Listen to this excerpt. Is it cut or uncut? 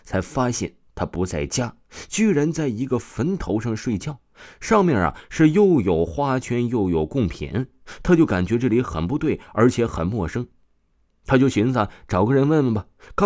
uncut